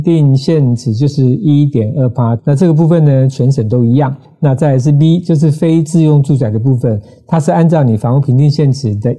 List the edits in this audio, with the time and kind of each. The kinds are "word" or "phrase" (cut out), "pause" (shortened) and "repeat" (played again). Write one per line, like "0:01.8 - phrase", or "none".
none